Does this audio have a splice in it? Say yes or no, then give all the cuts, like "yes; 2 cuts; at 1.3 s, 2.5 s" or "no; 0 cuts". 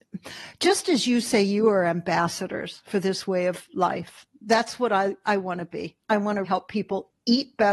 yes; 1 cut; at 6.4 s